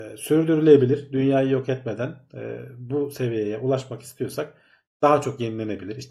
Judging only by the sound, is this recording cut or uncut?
uncut